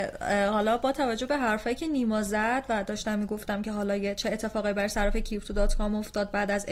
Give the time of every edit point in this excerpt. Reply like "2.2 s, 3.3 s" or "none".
none

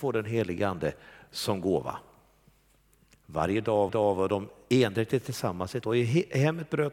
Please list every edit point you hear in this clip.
3.9 s, 5.8 s

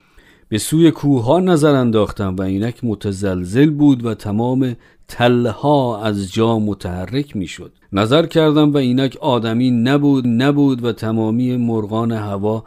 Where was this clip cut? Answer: 7.8 s, 10.2 s

